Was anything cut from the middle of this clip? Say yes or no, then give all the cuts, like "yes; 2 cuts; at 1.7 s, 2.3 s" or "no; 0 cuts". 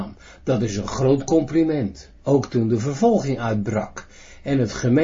yes; 1 cut; at 2.2 s